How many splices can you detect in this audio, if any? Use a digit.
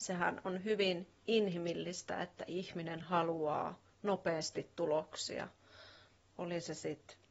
0